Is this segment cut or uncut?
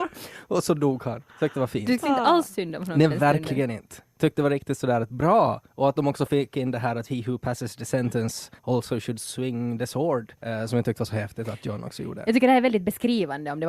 cut